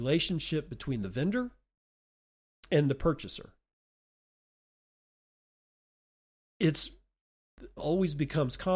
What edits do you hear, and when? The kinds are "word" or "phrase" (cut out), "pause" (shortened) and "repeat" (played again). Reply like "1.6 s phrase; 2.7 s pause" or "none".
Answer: 7.8 s word